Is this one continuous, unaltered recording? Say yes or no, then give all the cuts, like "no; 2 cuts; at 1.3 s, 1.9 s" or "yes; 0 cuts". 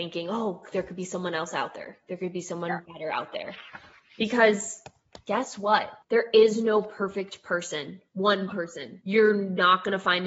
yes; 0 cuts